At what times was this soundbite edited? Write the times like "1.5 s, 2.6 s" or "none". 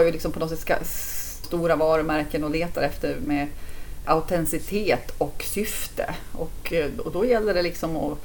1.4 s, 3.3 s, 4.0 s

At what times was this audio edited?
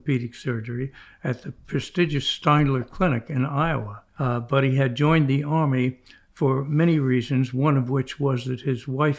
4.1 s

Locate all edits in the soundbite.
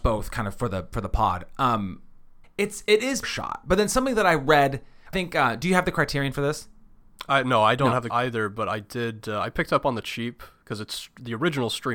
2.4 s, 3.2 s, 5.1 s, 8.1 s

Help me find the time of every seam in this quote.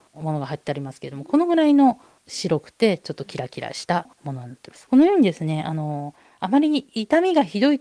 4.1 s

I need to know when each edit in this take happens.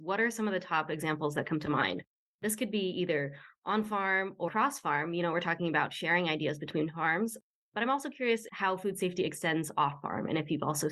4.5 s

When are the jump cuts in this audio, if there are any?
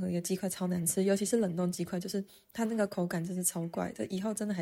none

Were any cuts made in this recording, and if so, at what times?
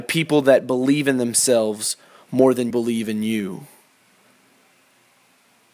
2.7 s

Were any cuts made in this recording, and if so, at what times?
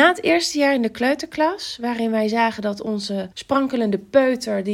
3.3 s

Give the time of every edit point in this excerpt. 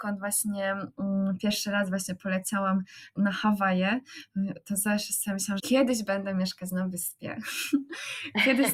3.1 s, 5.6 s

